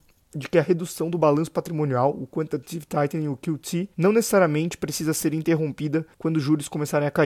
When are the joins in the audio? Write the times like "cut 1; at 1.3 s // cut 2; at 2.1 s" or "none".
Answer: cut 1; at 3.9 s // cut 2; at 6.1 s